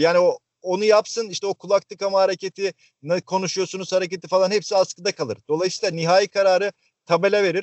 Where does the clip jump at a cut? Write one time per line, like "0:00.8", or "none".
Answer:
none